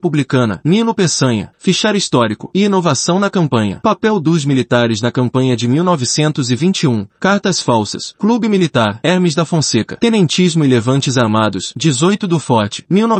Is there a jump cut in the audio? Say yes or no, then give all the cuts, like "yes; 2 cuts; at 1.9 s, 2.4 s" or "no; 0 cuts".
no; 0 cuts